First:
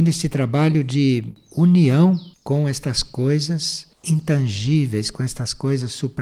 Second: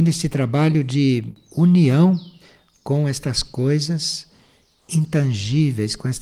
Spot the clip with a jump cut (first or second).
first